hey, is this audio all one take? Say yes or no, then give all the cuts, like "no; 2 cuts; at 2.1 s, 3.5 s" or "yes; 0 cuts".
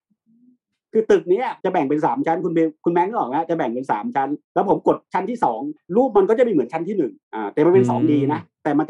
no; 4 cuts; at 1.6 s, 4.4 s, 5.8 s, 7.2 s